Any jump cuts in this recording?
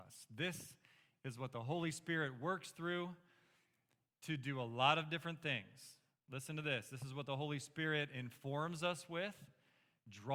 no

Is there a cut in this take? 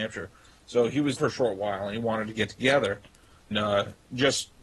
yes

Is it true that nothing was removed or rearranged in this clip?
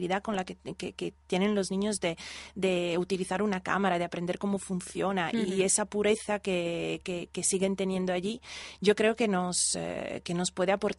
yes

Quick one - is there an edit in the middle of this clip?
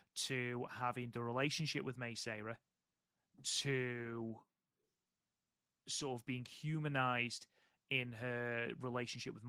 no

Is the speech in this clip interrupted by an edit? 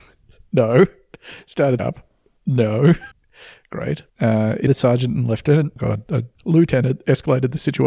yes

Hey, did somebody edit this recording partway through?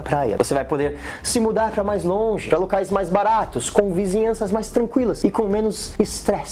no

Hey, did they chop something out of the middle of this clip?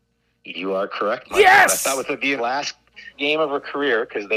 yes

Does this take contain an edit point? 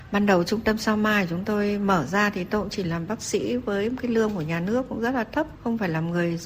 no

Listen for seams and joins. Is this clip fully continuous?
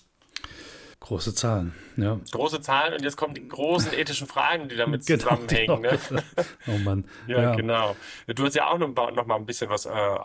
no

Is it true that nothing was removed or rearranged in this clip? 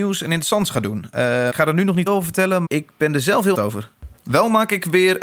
no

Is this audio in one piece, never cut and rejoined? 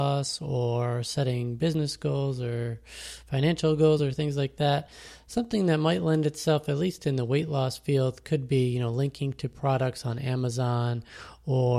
yes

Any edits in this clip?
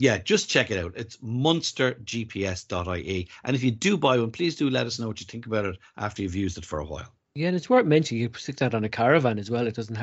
no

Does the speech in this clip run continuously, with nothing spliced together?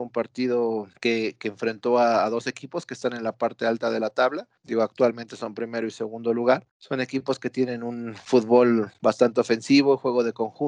no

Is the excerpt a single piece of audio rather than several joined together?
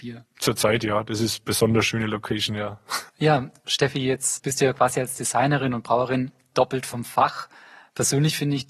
no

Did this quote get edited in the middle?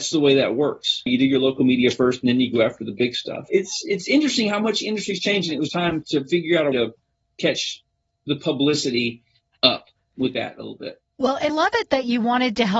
yes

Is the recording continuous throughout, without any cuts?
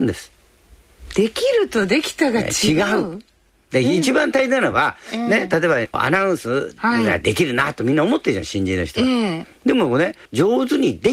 yes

